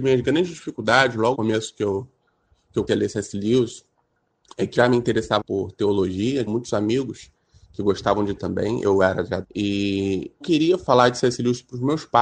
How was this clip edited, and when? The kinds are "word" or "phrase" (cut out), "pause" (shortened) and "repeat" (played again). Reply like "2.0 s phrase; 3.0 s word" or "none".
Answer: 1.3 s word; 2.9 s word; 4.8 s word; 5.4 s word; 6.5 s word; 8.4 s word; 9.4 s word; 10.4 s word